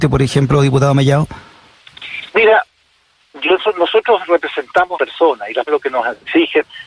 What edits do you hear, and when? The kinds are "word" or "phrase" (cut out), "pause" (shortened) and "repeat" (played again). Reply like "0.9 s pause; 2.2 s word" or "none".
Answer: 2.3 s pause; 5.0 s phrase; 5.7 s word